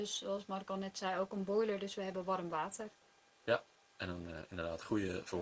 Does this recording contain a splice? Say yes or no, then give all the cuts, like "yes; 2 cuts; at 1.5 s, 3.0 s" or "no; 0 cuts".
no; 0 cuts